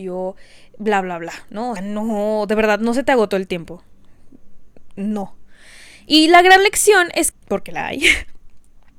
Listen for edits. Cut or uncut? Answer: cut